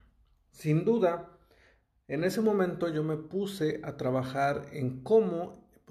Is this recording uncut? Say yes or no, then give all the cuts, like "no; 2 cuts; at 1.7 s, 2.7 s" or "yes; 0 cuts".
yes; 0 cuts